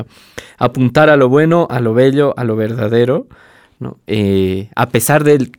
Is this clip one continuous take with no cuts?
yes; 0 cuts

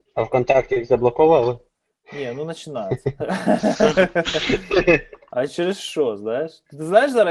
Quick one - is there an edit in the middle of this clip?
no; 0 cuts

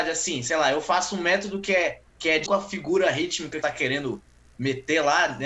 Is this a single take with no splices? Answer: no; 3 cuts; at 2.1 s, 2.5 s, 3.6 s

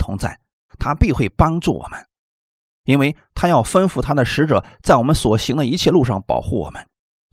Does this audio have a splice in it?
no; 0 cuts

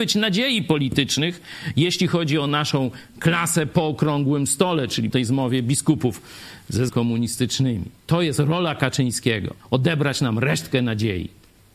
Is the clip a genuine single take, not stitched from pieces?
no; 3 cuts; at 5.1 s, 6.9 s, 9.6 s

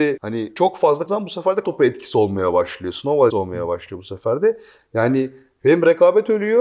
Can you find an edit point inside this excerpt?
yes; 3 cuts; at 1.1 s, 1.6 s, 3.3 s

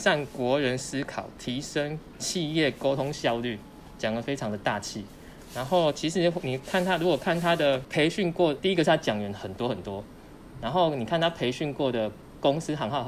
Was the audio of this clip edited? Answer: yes; 1 cut; at 8.6 s

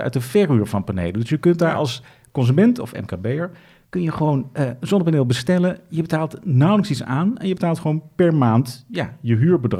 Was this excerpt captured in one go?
yes; 0 cuts

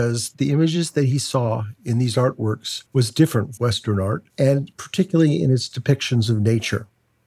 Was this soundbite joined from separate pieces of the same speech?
yes; 3 cuts; at 2.9 s, 3.6 s, 4.3 s

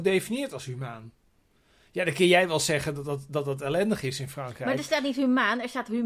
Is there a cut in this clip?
no; 0 cuts

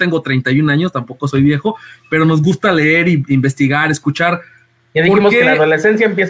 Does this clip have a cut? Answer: no; 0 cuts

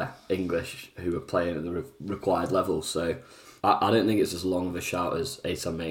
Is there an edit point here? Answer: yes; 1 cut; at 3.6 s

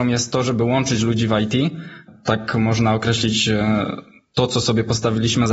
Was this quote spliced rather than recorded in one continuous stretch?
no; 0 cuts

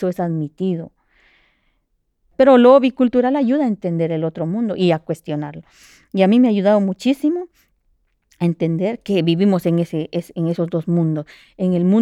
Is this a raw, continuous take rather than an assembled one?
yes; 0 cuts

